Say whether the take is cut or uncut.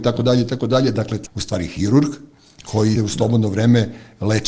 cut